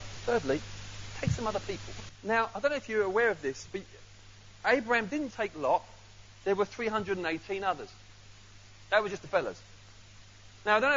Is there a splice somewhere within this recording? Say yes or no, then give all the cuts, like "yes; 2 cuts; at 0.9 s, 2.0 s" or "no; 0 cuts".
yes; 1 cut; at 5.3 s